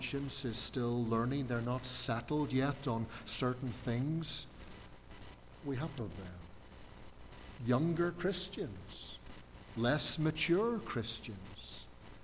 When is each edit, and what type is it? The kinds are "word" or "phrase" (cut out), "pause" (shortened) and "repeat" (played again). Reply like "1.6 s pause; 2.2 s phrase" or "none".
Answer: 6.0 s phrase